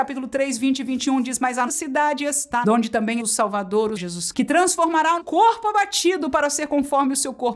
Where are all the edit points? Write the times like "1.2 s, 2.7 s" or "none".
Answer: 1.7 s, 2.6 s, 3.2 s, 4.0 s, 4.3 s, 5.2 s